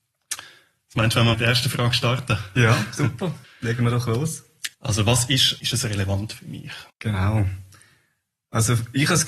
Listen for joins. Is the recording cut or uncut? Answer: cut